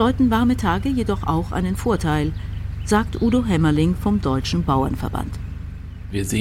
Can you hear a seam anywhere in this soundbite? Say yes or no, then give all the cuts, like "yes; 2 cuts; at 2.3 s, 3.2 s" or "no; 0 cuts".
no; 0 cuts